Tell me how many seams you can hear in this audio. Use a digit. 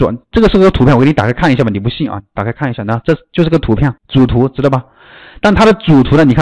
1